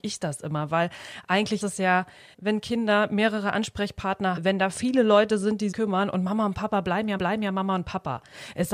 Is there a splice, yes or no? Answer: yes